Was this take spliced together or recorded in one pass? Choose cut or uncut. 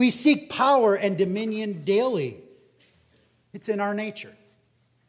uncut